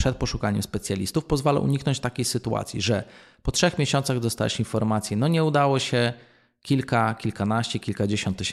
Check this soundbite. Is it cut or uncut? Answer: uncut